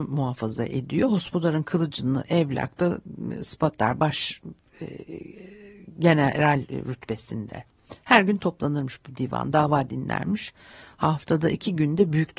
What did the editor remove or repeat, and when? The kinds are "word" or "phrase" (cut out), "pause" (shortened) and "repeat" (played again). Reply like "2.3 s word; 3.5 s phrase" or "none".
none